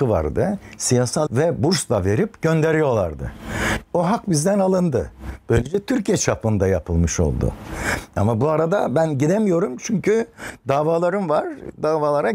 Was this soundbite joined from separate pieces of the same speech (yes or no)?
yes